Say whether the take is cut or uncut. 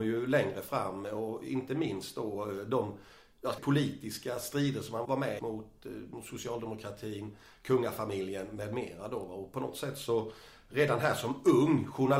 cut